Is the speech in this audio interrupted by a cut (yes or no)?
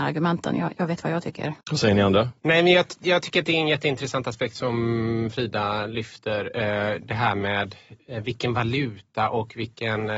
yes